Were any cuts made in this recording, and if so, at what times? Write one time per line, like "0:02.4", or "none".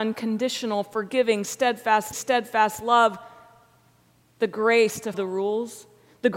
0:02.1
0:05.1